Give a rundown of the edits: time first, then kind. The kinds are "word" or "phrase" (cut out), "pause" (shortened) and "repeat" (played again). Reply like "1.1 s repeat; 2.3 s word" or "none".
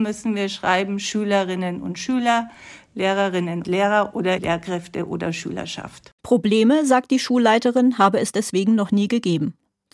3.6 s word; 4.4 s word; 6.2 s pause

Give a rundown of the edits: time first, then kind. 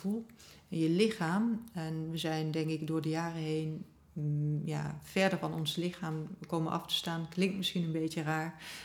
none

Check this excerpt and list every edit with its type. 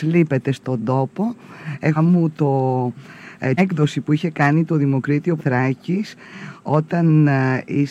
2.0 s word; 3.6 s word; 5.4 s word

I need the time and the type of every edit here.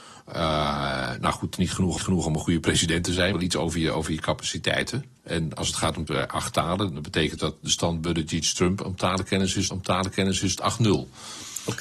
1.6 s phrase; 2.0 s repeat; 3.3 s phrase; 6.1 s phrase; 7.4 s word; 9.7 s repeat

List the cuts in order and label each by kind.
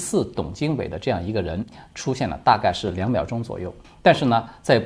3.8 s pause

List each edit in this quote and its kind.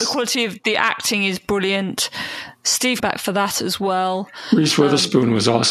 3.0 s phrase

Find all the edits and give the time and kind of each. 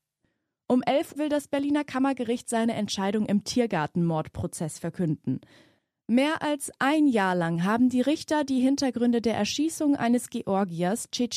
1.2 s word

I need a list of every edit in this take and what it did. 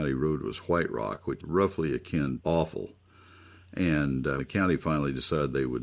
1.4 s word; 2.4 s word; 4.4 s word

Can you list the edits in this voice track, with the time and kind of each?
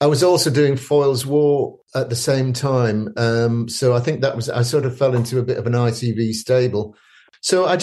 none

